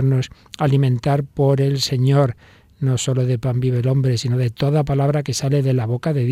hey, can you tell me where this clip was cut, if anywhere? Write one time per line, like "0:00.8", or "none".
none